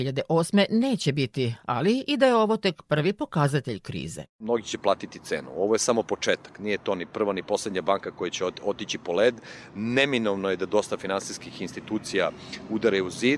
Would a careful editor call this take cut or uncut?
uncut